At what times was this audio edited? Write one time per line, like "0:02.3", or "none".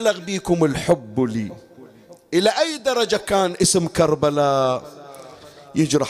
none